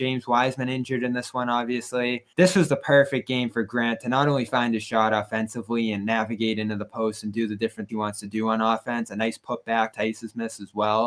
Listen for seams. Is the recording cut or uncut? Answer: cut